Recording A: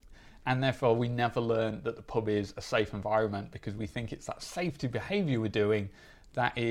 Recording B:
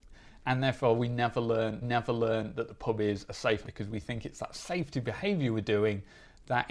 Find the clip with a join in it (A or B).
B